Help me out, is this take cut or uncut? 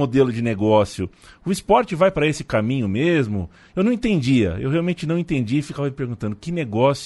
uncut